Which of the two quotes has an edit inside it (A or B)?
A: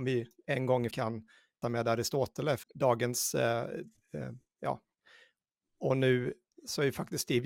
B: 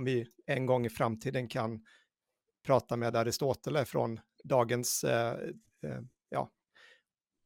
A